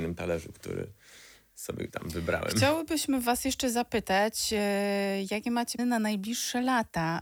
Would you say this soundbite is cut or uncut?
cut